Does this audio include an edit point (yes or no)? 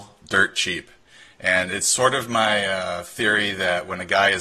no